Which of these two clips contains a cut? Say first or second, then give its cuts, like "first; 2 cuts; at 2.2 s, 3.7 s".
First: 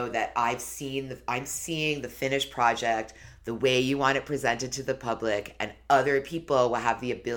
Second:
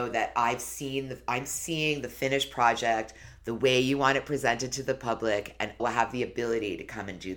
second; 1 cut; at 5.8 s